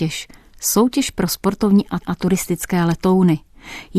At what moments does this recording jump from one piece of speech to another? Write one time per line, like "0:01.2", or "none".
0:02.0